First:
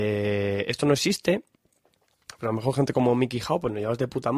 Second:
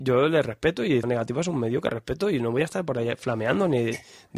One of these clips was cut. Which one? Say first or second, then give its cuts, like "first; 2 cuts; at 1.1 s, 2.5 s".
second; 1 cut; at 1.0 s